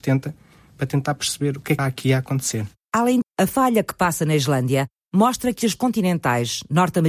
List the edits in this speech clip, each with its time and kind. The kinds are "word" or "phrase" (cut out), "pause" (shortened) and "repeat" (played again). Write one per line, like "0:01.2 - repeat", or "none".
0:01.8 - word
0:03.2 - word
0:05.7 - word